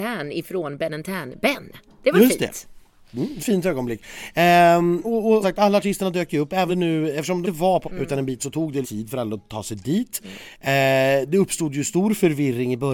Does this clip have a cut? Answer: yes; 8 cuts; at 3.4 s, 5.0 s, 5.4 s, 6.7 s, 7.4 s, 7.8 s, 8.4 s, 8.8 s

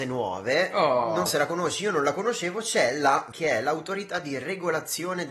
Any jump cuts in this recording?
yes; 2 cuts; at 1.3 s, 3.3 s

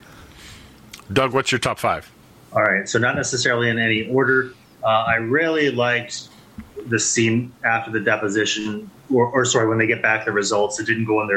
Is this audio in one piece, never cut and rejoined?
yes; 0 cuts

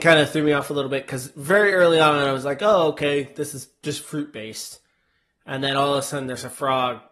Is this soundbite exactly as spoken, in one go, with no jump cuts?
yes; 0 cuts

